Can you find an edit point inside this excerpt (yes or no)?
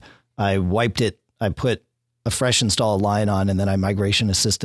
no